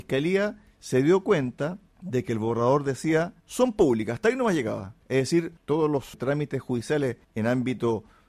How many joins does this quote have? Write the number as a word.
three